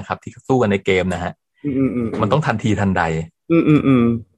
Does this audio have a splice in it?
no; 0 cuts

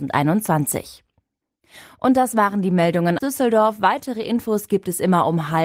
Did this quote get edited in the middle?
yes; 1 cut; at 3.2 s

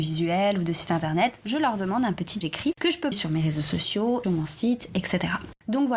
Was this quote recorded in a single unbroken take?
no; 3 cuts; at 2.4 s, 3.1 s, 4.2 s

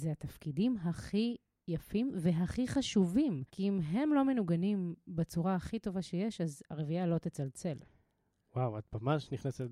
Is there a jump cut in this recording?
yes; 1 cut; at 3.5 s

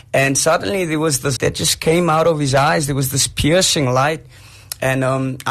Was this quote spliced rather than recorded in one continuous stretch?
yes; 1 cut; at 1.4 s

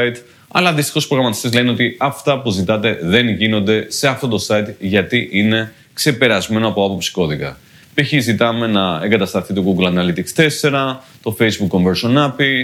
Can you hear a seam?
no; 0 cuts

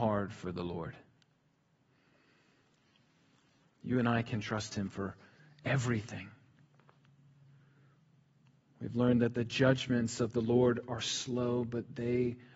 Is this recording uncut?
yes; 0 cuts

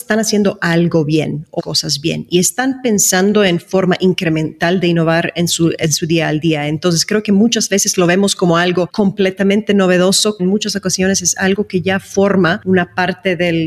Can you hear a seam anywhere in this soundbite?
yes; 2 cuts; at 1.6 s, 10.4 s

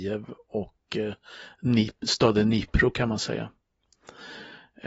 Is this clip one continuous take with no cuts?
yes; 0 cuts

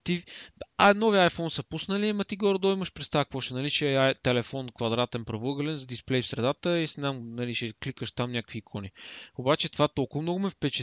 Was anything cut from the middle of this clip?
no; 0 cuts

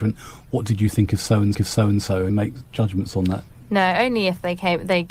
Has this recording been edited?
yes; 2 cuts; at 1.5 s, 2.3 s

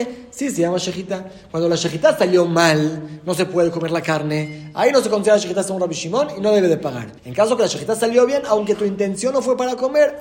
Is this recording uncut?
no; 1 cut; at 7.2 s

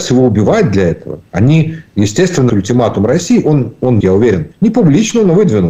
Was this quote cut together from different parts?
yes; 3 cuts; at 2.5 s, 4.0 s, 4.5 s

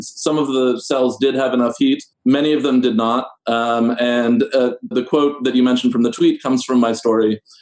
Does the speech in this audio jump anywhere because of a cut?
yes; 2 cuts; at 2.1 s, 4.9 s

